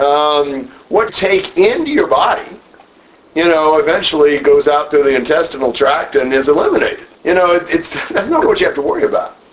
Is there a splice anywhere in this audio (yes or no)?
yes